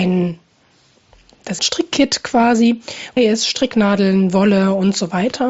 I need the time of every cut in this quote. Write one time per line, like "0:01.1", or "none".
0:01.6
0:03.2

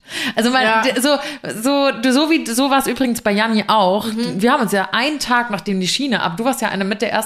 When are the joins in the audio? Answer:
none

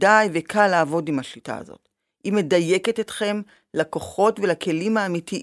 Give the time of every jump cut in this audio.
none

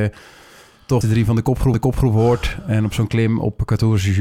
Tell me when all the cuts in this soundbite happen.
0:01.0
0:01.7

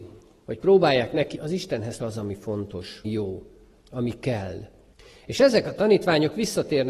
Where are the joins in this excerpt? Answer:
0:01.3
0:02.0
0:03.0
0:04.9

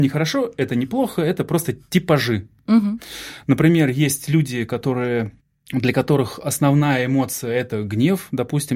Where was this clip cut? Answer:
0:05.4

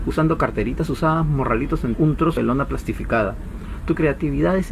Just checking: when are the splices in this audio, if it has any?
0:01.9
0:02.4

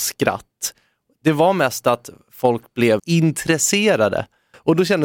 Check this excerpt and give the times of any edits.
0:03.0

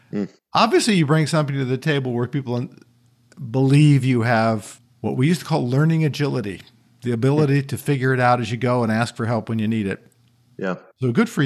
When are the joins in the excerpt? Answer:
none

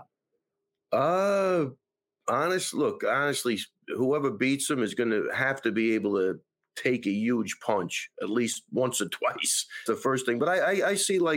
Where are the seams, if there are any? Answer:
0:09.9

